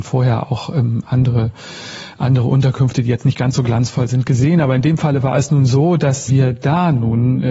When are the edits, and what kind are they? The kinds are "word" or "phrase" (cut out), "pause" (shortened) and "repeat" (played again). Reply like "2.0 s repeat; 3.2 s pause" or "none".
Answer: 6.3 s word